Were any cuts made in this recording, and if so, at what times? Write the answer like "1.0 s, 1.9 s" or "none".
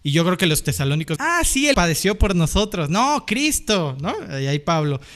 1.2 s, 1.7 s